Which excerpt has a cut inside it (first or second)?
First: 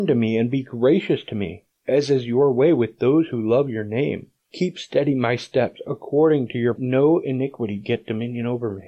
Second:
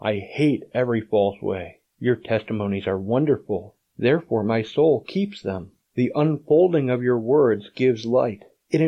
first